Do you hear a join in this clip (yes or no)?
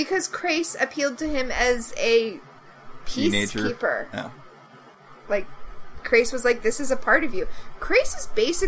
no